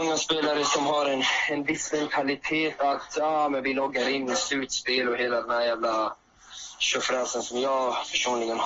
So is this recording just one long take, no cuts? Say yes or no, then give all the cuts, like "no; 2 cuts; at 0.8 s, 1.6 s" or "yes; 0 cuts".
yes; 0 cuts